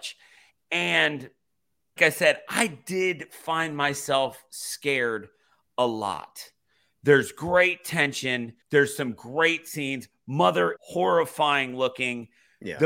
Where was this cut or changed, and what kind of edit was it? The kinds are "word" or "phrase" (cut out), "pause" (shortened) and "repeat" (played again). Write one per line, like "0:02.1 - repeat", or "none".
0:02.0 - word
0:08.6 - pause
0:10.8 - word